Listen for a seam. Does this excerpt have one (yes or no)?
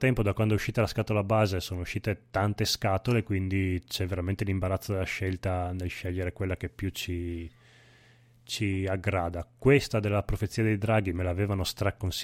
no